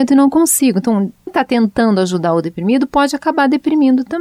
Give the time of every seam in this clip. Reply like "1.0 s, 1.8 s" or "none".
1.3 s